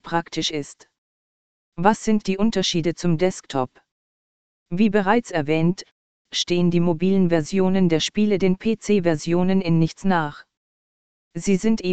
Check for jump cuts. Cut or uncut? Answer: uncut